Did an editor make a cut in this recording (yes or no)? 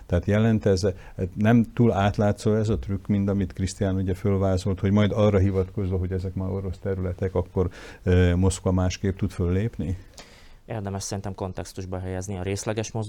no